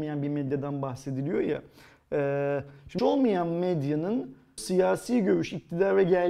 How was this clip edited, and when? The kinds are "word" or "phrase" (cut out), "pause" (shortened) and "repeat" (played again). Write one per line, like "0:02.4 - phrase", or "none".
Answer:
0:03.0 - word
0:04.6 - word